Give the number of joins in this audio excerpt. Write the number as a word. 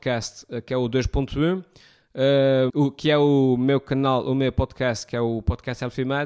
one